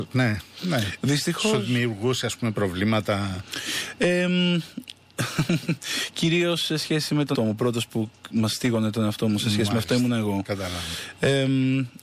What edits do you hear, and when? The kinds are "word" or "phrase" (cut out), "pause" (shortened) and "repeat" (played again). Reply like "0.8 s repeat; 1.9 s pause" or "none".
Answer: 7.3 s word